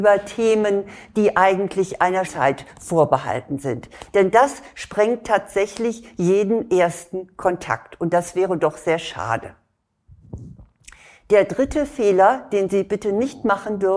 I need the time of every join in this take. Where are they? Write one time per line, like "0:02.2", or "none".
0:02.2